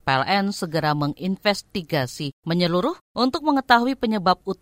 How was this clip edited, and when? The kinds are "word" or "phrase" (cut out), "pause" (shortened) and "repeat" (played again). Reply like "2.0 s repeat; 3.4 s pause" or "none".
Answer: none